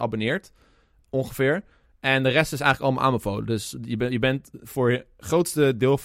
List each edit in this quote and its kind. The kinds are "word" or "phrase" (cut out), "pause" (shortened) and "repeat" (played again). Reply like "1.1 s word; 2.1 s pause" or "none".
none